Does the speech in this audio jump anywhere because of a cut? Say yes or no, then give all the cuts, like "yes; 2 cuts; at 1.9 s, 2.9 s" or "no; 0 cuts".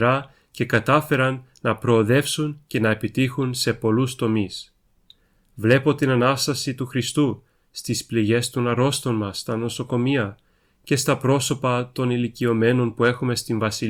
no; 0 cuts